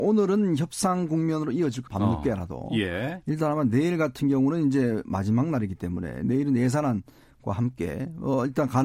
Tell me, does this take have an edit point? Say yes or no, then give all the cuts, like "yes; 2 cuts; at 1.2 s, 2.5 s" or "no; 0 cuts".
yes; 1 cut; at 1.9 s